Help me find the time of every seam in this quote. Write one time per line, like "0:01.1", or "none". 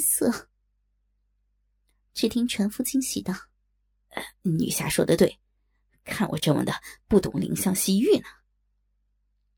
none